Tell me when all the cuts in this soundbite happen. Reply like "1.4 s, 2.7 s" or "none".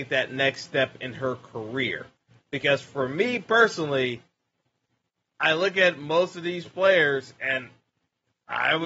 none